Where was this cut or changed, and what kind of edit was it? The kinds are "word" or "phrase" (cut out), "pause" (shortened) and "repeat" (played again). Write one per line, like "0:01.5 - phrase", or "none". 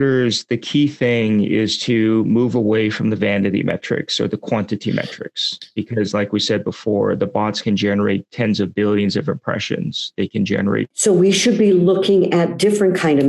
none